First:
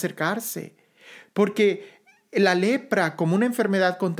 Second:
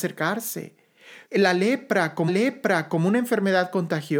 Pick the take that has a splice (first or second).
second